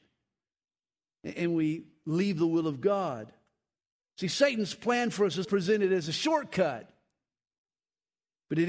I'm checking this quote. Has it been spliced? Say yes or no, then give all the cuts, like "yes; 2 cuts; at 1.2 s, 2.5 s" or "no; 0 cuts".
yes; 1 cut; at 5.4 s